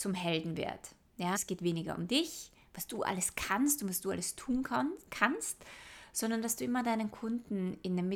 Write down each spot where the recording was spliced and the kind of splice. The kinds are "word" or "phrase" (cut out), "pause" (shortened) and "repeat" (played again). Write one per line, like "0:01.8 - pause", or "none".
0:01.3 - word